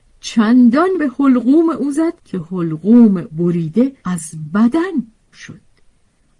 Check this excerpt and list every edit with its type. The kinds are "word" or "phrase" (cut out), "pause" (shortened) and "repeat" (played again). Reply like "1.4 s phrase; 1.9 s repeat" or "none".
1.0 s word; 2.2 s pause; 3.3 s word; 4.0 s pause; 5.3 s word